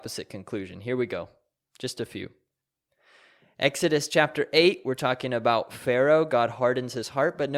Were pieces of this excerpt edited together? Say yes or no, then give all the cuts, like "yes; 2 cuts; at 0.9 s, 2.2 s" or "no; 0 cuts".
no; 0 cuts